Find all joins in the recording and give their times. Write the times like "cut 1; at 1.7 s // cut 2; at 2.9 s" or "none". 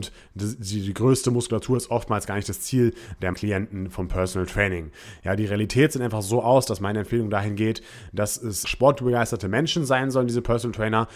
cut 1; at 3.3 s // cut 2; at 8.6 s